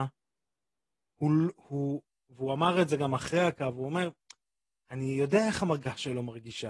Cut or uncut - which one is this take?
uncut